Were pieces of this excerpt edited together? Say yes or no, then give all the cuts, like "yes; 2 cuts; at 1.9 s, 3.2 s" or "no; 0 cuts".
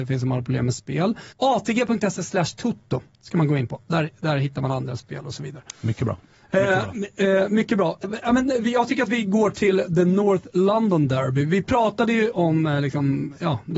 yes; 2 cuts; at 1.3 s, 8.0 s